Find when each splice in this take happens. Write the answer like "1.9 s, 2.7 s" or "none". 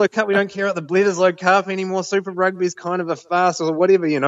none